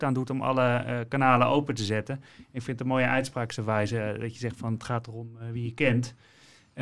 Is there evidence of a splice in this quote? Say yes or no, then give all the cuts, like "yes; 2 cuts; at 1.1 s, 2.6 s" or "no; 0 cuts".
no; 0 cuts